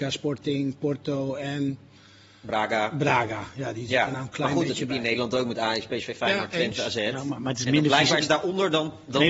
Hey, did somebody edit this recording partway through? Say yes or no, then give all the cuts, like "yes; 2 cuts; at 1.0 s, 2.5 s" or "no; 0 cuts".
no; 0 cuts